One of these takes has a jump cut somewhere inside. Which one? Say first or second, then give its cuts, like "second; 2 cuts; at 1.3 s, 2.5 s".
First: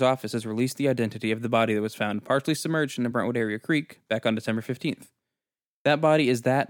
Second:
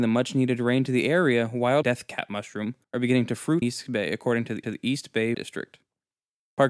second; 5 cuts; at 1.8 s, 2.8 s, 3.6 s, 4.6 s, 5.3 s